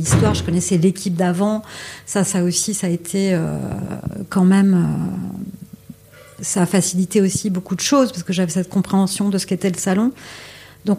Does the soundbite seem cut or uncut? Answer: cut